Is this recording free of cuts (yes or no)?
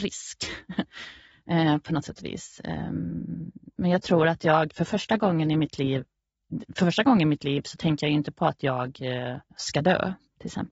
no